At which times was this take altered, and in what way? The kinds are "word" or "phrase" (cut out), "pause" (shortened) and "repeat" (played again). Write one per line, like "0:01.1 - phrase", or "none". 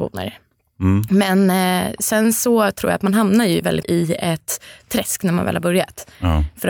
0:03.8 - word